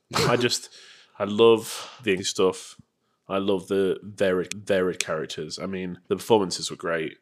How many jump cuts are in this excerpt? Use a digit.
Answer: 3